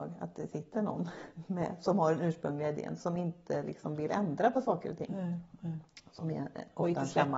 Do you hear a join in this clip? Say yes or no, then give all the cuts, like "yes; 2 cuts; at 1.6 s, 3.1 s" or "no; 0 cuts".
no; 0 cuts